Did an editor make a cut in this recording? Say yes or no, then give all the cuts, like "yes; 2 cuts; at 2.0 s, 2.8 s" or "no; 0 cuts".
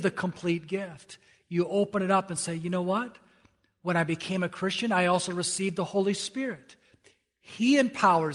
no; 0 cuts